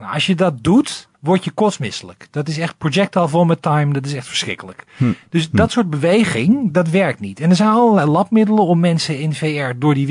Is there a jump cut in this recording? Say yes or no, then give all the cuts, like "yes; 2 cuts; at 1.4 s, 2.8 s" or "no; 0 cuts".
yes; 1 cut; at 1.1 s